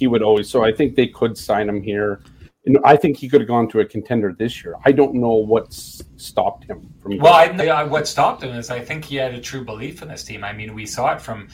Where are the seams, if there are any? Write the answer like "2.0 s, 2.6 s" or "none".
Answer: 7.0 s, 7.6 s

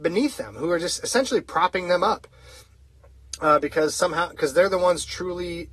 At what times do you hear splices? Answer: none

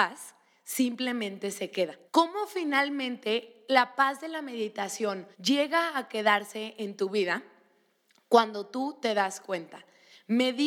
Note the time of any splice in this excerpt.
2.1 s, 5.3 s

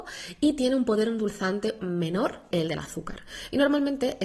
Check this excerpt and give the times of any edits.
1.8 s, 2.5 s

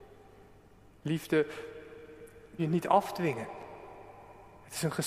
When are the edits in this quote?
2.6 s

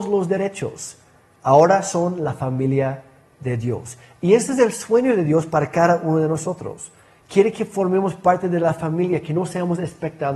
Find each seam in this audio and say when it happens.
none

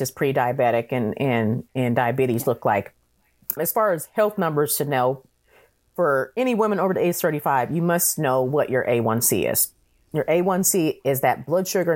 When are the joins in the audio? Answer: 1.7 s, 3.6 s

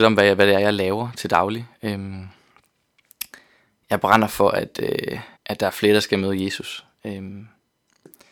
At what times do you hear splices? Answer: 5.4 s

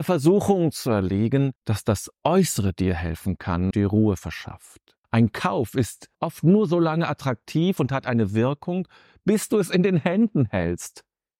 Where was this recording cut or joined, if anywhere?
1.6 s, 3.7 s, 5.0 s, 6.1 s

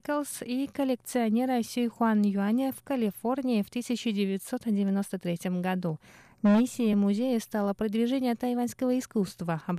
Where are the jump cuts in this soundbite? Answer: none

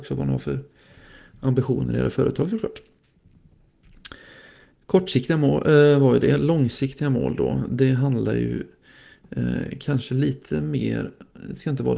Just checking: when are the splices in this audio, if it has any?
none

